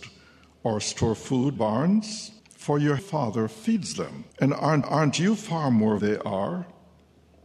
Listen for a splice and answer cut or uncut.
cut